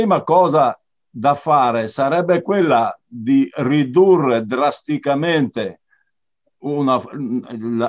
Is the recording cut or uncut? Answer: uncut